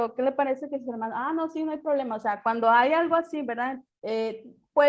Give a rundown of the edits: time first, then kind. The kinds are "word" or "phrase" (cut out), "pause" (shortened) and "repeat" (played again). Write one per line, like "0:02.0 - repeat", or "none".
0:03.9 - pause